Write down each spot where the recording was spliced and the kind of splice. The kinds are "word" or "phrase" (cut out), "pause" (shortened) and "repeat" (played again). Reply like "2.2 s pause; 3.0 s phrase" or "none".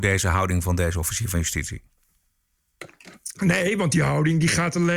none

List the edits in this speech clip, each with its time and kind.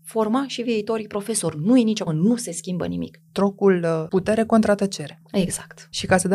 2.1 s word

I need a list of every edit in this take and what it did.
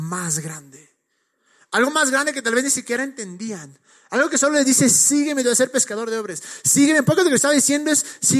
none

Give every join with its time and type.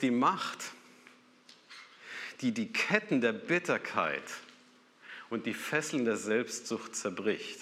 none

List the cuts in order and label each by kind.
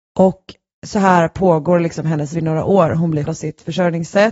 2.3 s word; 3.3 s phrase

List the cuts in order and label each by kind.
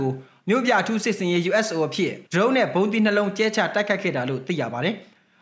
2.3 s pause

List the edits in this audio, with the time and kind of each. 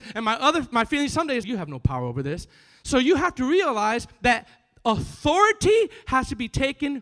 1.4 s word

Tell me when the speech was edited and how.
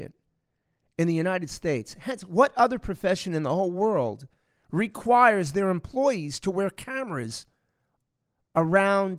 none

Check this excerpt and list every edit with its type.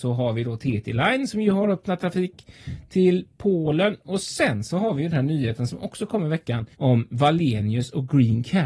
6.7 s pause

